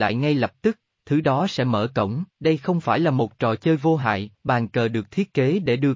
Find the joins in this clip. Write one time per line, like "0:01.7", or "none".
0:02.3
0:04.3